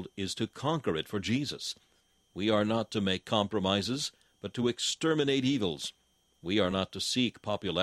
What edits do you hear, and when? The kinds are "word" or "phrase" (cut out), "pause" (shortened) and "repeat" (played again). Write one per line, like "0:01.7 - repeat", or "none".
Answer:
none